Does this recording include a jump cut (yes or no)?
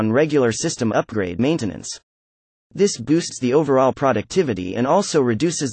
yes